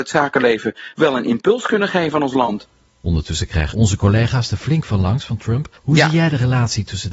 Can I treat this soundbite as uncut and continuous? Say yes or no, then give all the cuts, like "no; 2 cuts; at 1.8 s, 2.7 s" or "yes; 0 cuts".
no; 3 cuts; at 2.9 s, 3.7 s, 5.8 s